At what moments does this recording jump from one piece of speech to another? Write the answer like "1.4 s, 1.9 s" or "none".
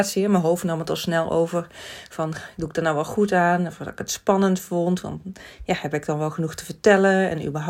none